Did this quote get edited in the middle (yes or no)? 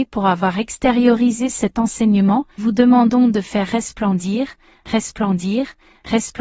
yes